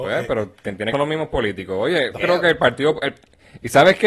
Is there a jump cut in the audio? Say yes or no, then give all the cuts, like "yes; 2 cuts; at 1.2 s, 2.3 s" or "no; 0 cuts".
yes; 2 cuts; at 0.9 s, 2.2 s